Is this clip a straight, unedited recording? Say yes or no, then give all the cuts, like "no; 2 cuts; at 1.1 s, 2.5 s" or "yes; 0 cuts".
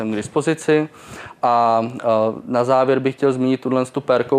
yes; 0 cuts